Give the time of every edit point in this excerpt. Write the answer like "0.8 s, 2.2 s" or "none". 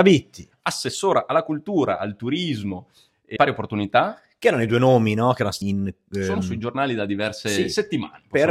3.4 s, 5.6 s